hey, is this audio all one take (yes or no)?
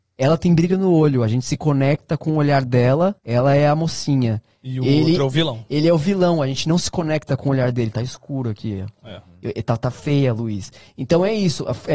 no